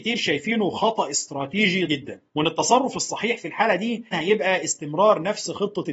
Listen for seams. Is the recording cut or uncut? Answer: cut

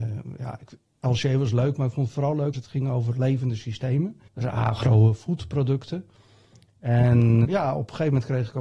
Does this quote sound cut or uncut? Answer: cut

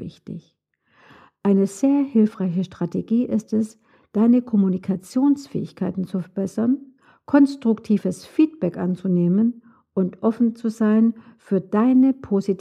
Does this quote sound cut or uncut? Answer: uncut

